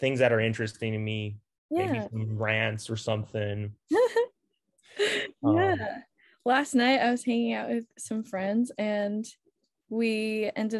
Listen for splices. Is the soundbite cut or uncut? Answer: uncut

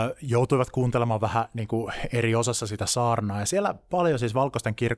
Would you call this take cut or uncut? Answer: uncut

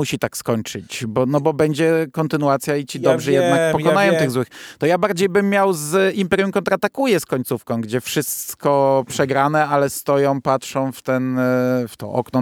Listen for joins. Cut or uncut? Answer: uncut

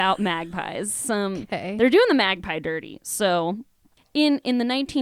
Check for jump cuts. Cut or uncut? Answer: uncut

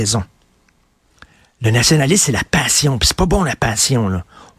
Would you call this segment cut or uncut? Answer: uncut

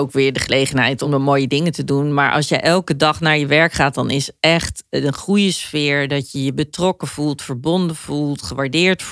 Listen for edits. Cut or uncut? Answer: uncut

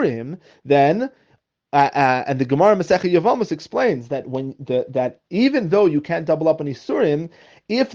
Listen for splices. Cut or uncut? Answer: uncut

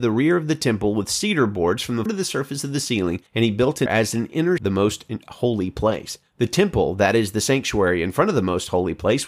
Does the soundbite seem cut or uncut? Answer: cut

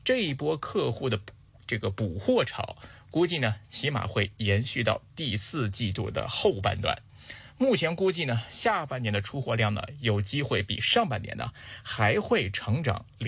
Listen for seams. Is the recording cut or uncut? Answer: uncut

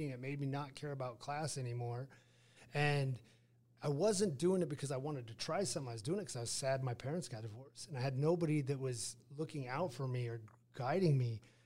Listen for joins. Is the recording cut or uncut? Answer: uncut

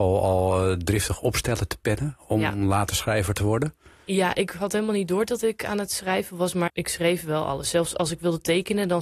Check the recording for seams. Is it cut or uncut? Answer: cut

